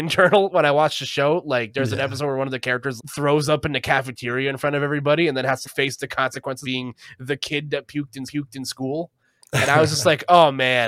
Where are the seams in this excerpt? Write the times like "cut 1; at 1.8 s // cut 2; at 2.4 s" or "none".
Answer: cut 1; at 3.0 s // cut 2; at 5.6 s // cut 3; at 6.6 s // cut 4; at 8.3 s